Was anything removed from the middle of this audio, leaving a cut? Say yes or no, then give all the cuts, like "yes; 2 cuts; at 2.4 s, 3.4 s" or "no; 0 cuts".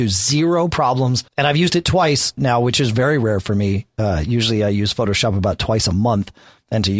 yes; 2 cuts; at 1.3 s, 2.4 s